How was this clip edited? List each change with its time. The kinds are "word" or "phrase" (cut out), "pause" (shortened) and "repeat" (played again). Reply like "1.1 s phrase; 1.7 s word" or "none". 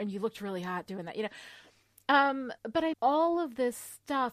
2.6 s pause; 2.9 s word